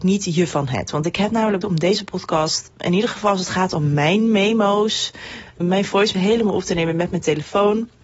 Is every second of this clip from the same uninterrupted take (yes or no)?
no